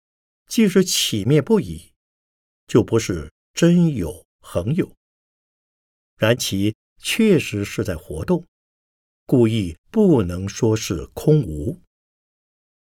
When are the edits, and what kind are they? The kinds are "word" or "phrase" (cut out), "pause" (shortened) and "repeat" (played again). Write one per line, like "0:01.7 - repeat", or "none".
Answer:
0:09.8 - pause

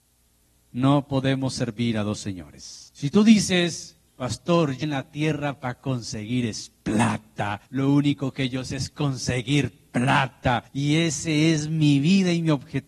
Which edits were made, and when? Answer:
0:02.9 - pause
0:04.1 - pause
0:04.8 - word
0:07.7 - pause
0:10.7 - pause

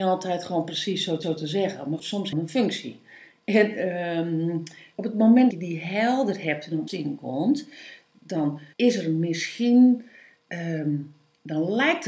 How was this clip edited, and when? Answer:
0:01.2 - repeat
0:02.0 - word
0:02.3 - phrase
0:04.9 - word
0:05.5 - word
0:06.9 - phrase
0:08.7 - pause

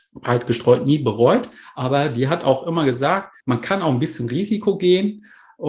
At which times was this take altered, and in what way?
0:03.4 - pause

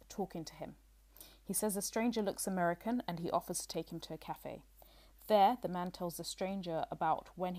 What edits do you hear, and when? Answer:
none

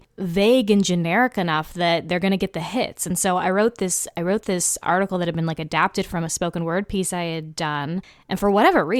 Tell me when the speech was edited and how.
none

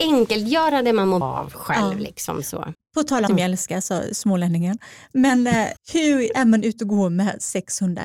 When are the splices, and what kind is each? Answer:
0:01.2 - word
0:02.7 - word
0:03.3 - phrase
0:05.8 - pause

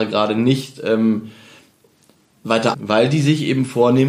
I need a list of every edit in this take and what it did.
0:02.7 - word

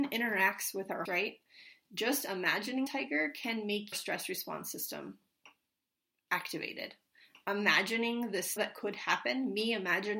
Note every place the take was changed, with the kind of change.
0:01.1 - word
0:02.9 - word
0:03.9 - word
0:08.6 - word

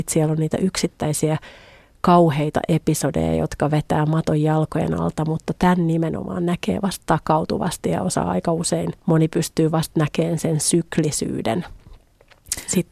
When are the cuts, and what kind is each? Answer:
0:09.0 - pause

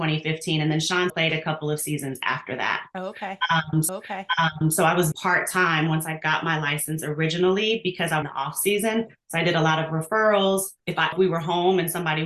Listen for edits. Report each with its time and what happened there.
0:01.1 - word
0:03.9 - repeat
0:05.1 - word
0:08.2 - phrase
0:10.8 - pause
0:11.1 - phrase

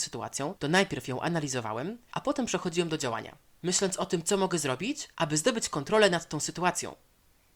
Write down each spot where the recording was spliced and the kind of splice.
none

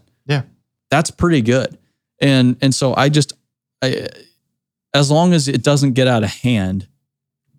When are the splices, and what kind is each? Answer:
none

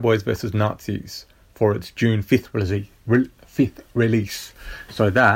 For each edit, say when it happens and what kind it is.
0:03.4 - word

